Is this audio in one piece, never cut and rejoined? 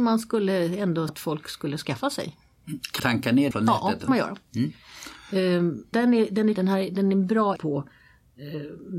no; 7 cuts; at 1.1 s, 3.0 s, 3.5 s, 4.1 s, 5.9 s, 6.5 s, 7.6 s

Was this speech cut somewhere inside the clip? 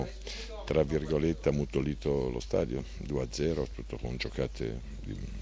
no; 0 cuts

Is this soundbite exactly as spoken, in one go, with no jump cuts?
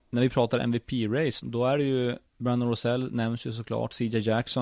no; 2 cuts; at 1.4 s, 2.3 s

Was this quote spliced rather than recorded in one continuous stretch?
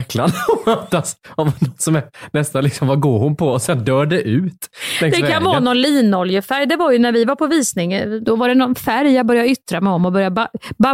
no; 0 cuts

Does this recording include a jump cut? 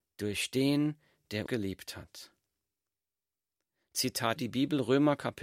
yes; 2 cuts; at 1.5 s, 4.4 s

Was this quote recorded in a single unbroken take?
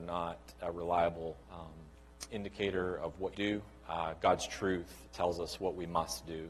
no; 2 cuts; at 1.4 s, 3.3 s

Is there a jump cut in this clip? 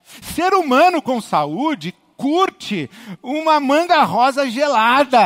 no; 0 cuts

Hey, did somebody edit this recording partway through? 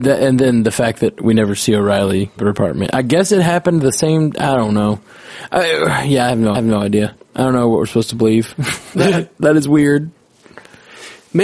yes; 3 cuts; at 2.4 s, 6.5 s, 8.9 s

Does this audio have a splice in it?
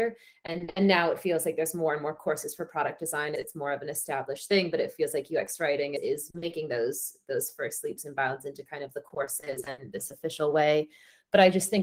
no; 0 cuts

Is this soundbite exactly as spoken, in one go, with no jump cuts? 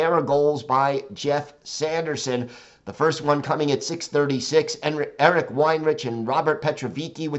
yes; 0 cuts

